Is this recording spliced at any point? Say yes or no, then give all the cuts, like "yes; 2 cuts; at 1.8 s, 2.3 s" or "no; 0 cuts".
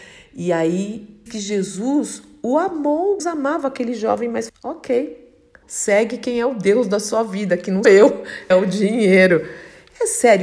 yes; 6 cuts; at 1.3 s, 3.2 s, 4.5 s, 5.6 s, 7.8 s, 8.5 s